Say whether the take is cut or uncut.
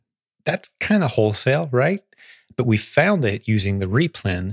uncut